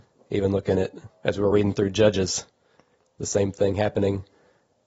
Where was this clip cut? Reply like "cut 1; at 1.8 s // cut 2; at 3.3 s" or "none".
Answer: none

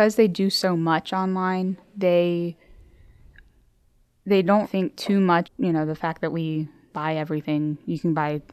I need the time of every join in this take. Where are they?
cut 1; at 4.6 s // cut 2; at 5.4 s // cut 3; at 6.9 s

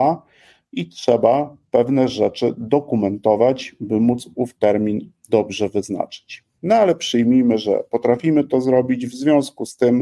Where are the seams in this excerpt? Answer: none

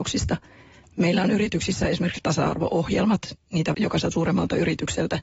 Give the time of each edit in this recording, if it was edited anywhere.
cut 1; at 2.2 s // cut 2; at 3.7 s // cut 3; at 4.1 s

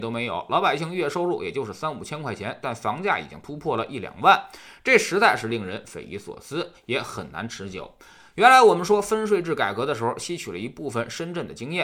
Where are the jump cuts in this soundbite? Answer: none

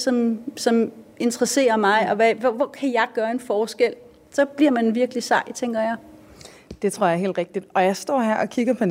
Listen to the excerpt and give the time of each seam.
none

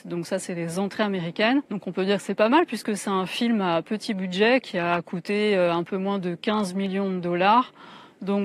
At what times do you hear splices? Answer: cut 1; at 1.7 s

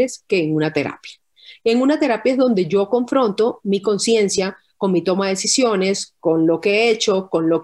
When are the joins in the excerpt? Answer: none

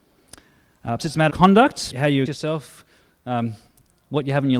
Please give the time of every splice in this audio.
cut 1; at 1.0 s // cut 2; at 1.3 s // cut 3; at 1.9 s // cut 4; at 2.3 s

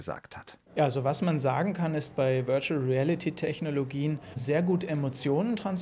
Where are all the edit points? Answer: cut 1; at 2.1 s

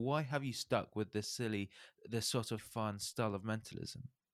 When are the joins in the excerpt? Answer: cut 1; at 2.6 s

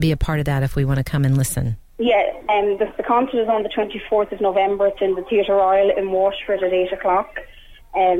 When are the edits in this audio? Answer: cut 1; at 1.9 s

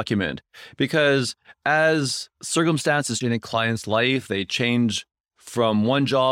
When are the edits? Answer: cut 1; at 3.2 s

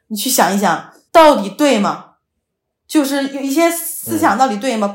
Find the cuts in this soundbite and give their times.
cut 1; at 1.1 s

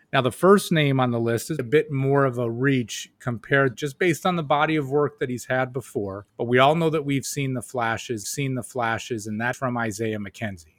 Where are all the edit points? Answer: cut 1; at 1.6 s // cut 2; at 3.7 s // cut 3; at 6.3 s // cut 4; at 8.2 s // cut 5; at 9.5 s

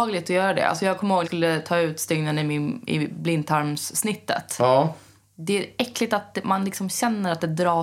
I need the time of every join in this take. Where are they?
cut 1; at 1.2 s

